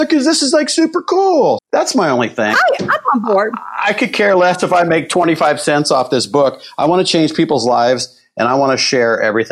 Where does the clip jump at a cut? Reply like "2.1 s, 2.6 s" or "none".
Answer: 1.6 s, 2.5 s